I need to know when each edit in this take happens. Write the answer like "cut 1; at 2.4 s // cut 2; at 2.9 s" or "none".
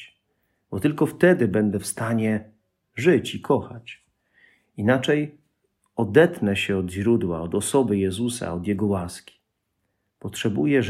none